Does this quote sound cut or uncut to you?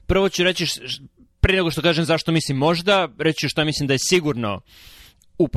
uncut